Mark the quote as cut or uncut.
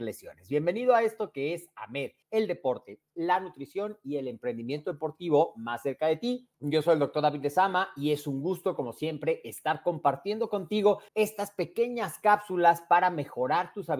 cut